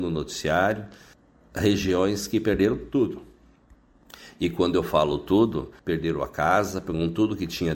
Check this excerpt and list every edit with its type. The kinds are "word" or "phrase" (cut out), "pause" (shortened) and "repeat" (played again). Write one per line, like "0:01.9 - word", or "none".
0:01.1 - pause
0:05.8 - pause